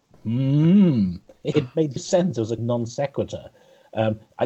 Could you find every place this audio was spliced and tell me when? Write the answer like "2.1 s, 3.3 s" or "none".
1.5 s, 2.0 s, 2.6 s